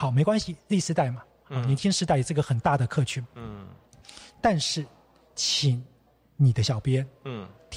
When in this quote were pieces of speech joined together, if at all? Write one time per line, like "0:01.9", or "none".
none